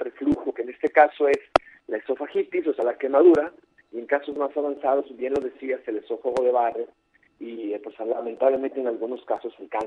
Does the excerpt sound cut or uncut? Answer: uncut